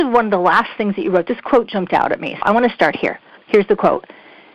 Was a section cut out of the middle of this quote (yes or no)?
yes